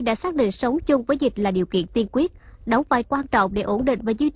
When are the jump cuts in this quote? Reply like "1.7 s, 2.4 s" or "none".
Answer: 3.0 s